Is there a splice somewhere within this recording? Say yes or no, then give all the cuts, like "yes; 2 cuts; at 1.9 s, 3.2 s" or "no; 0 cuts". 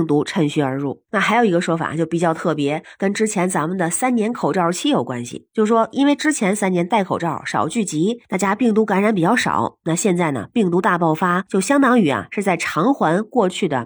no; 0 cuts